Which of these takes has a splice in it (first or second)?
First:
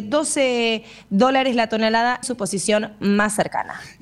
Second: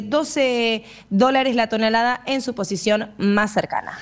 first